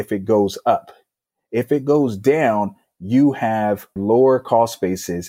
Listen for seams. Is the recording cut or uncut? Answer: cut